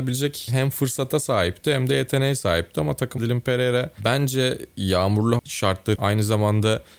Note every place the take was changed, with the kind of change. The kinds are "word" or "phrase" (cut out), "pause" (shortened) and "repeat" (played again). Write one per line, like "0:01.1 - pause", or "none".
0:03.2 - word
0:05.4 - word
0:05.9 - word